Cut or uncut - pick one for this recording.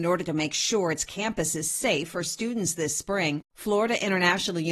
uncut